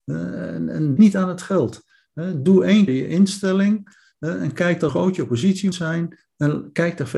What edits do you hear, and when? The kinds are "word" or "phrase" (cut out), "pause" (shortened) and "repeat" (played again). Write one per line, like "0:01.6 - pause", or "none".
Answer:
0:01.0 - word
0:02.9 - word
0:04.9 - word
0:05.7 - word